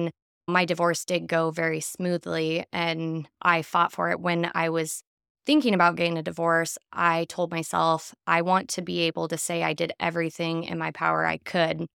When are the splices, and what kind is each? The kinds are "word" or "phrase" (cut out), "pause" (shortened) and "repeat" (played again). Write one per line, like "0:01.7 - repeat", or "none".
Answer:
none